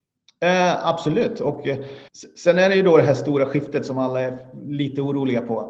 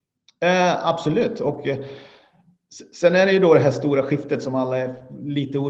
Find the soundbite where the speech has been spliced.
first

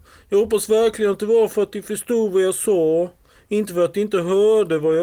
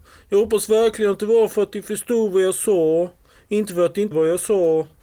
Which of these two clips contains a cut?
second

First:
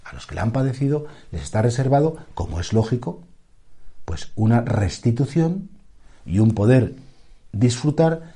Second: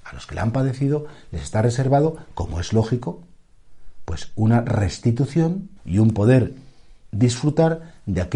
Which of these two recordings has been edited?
second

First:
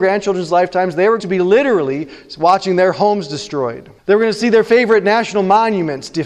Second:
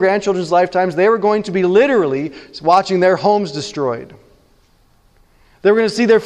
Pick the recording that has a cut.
first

